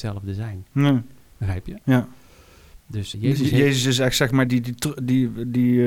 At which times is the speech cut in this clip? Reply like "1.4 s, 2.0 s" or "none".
3.1 s, 4.5 s

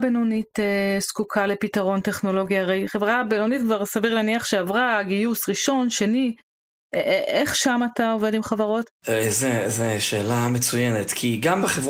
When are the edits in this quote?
none

